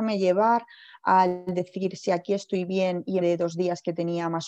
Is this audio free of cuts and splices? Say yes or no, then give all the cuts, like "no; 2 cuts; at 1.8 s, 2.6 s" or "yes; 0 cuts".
no; 1 cut; at 3.2 s